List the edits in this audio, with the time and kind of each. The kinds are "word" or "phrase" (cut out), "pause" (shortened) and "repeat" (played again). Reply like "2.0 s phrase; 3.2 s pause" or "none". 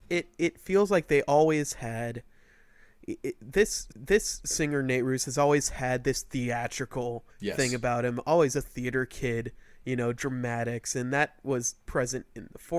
3.9 s repeat; 7.3 s pause

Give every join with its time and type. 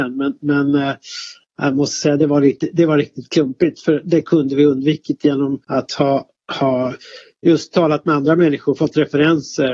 5.6 s pause

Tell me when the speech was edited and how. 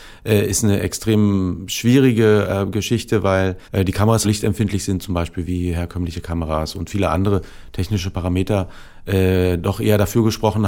3.6 s pause; 4.2 s phrase

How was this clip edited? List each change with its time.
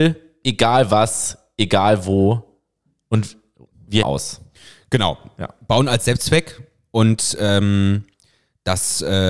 4.0 s word

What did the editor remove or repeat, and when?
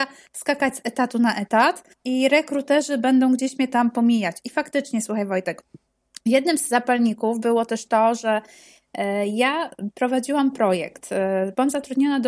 1.9 s pause

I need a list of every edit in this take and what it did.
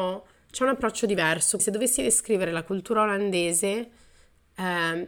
1.6 s word

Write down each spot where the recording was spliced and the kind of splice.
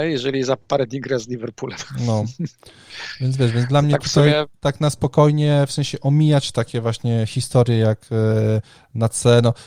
none

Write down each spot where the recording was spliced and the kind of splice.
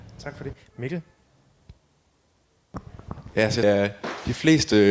3.6 s phrase

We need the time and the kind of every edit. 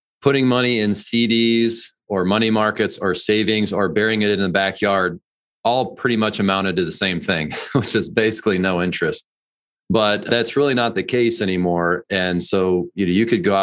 none

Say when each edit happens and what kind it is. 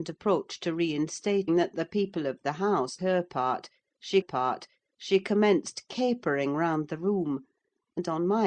1.5 s phrase; 3.0 s word; 4.2 s repeat

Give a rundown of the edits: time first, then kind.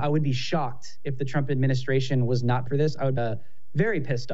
2.7 s word; 3.2 s phrase

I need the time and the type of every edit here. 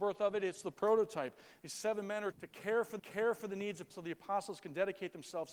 2.3 s word; 3.0 s repeat; 3.9 s word

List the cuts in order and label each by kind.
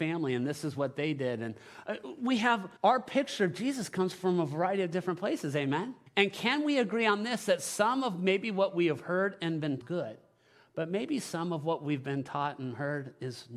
2.8 s pause; 6.1 s pause; 9.8 s phrase

